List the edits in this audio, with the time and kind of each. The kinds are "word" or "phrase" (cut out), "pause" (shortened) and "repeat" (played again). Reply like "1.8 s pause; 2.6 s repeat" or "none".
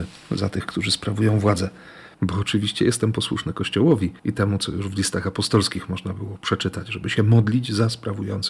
2.1 s pause; 4.2 s pause